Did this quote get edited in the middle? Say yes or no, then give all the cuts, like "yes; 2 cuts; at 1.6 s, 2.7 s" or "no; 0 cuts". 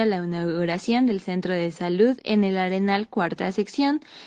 no; 0 cuts